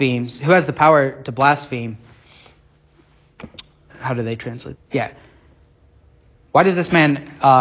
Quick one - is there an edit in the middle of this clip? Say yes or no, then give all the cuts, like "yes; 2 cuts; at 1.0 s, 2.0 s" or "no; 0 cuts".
yes; 2 cuts; at 3.9 s, 4.8 s